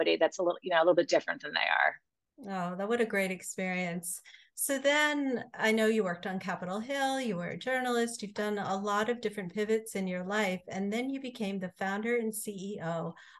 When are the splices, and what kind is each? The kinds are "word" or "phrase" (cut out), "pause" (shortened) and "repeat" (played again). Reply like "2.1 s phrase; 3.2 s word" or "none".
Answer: none